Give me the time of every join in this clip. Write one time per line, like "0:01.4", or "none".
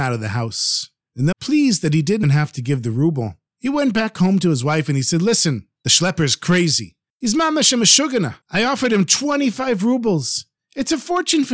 0:01.3
0:02.2
0:08.4